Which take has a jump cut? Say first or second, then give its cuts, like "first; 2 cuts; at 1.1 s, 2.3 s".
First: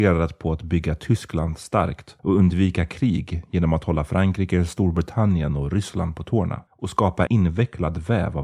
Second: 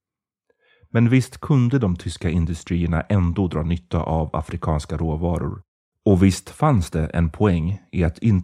first; 3 cuts; at 2.2 s, 6.7 s, 7.3 s